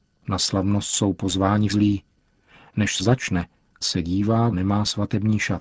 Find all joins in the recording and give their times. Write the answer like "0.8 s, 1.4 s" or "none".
1.7 s, 3.0 s, 3.8 s, 4.5 s

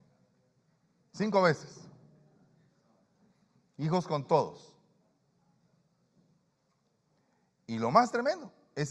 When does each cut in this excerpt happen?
none

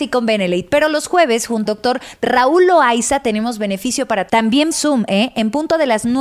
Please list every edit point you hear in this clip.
1.6 s, 4.3 s, 4.7 s

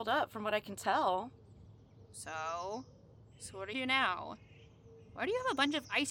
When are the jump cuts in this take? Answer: 3.7 s

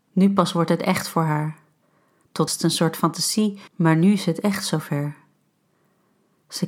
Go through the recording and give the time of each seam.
2.5 s, 3.7 s

